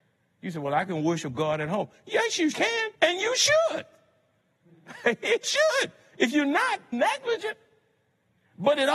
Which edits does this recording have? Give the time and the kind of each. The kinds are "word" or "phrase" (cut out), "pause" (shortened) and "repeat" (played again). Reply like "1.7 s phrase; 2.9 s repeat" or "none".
2.5 s word; 2.9 s pause; 5.4 s word; 6.9 s word